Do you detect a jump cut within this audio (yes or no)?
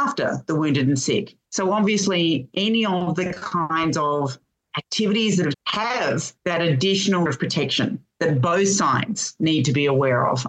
yes